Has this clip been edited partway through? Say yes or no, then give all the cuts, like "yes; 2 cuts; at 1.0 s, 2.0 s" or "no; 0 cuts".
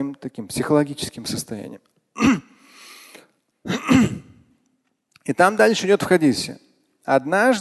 no; 0 cuts